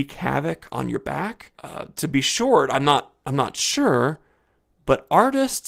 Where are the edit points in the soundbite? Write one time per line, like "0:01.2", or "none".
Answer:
0:01.5